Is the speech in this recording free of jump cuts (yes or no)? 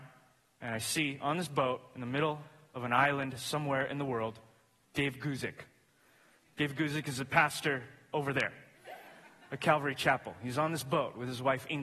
yes